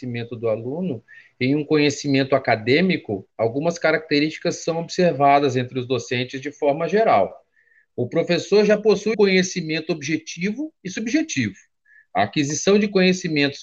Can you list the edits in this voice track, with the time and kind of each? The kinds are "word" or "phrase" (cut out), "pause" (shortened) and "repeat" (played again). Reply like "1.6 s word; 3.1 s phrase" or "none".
9.1 s word

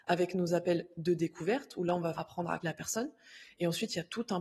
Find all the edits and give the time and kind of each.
2.1 s word; 2.6 s word

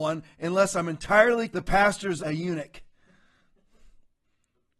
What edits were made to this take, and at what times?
1.5 s word; 2.2 s phrase

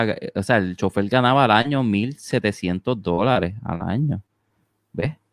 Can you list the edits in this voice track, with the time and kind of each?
none

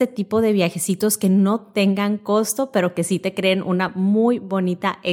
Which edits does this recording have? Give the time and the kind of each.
none

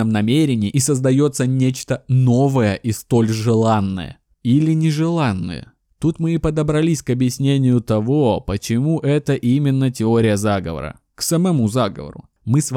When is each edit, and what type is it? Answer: none

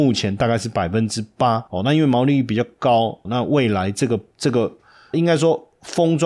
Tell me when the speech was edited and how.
1.7 s pause; 3.2 s word; 4.3 s pause; 5.1 s word

